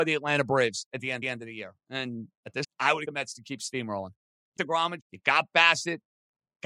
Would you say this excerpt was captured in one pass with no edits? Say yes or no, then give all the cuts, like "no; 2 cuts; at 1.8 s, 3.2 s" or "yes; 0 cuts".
no; 5 cuts; at 1.2 s, 2.6 s, 3.0 s, 4.6 s, 5.0 s